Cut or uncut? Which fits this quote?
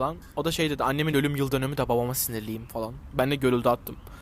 uncut